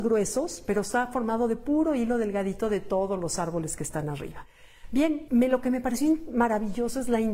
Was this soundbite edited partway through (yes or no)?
yes